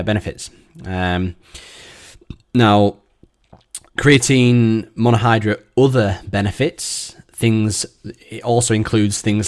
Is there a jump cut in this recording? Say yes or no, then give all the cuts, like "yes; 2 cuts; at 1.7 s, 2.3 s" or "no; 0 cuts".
yes; 1 cut; at 3.9 s